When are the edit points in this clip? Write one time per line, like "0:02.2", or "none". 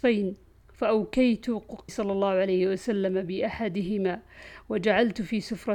0:01.9